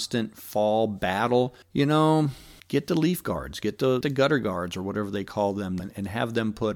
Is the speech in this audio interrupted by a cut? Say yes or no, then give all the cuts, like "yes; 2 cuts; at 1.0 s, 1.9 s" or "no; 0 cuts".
yes; 4 cuts; at 1.6 s, 2.6 s, 4.0 s, 5.8 s